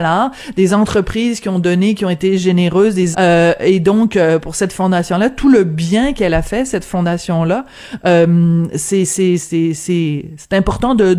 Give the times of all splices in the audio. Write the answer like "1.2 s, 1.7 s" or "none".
3.1 s, 9.4 s